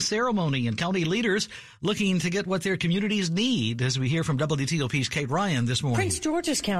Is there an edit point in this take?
no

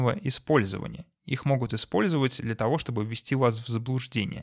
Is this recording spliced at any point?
no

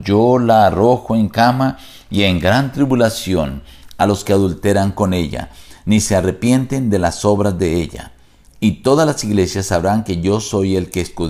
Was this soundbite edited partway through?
no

